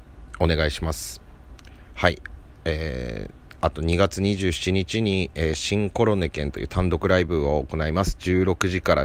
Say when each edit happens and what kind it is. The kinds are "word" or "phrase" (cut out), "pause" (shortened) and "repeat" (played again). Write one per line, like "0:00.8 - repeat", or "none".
none